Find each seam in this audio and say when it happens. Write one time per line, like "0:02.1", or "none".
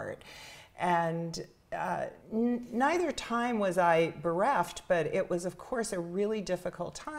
0:02.2